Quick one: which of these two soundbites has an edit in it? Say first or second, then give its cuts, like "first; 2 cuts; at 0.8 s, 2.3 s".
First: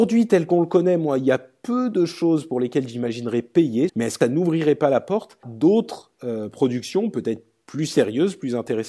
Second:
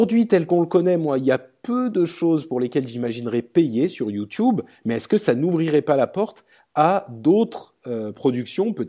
first; 3 cuts; at 3.9 s, 4.2 s, 5.4 s